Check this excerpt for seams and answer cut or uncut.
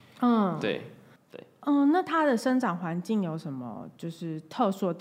uncut